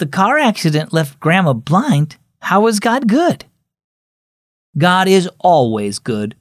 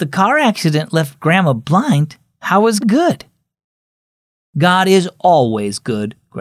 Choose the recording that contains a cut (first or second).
second